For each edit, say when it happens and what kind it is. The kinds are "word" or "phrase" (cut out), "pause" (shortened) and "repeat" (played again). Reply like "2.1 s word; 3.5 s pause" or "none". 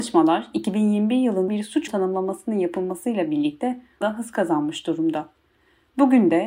1.5 s word; 1.9 s word; 4.0 s word